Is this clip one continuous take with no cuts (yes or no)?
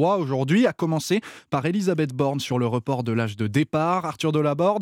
yes